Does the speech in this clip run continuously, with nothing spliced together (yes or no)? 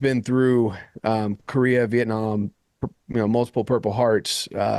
yes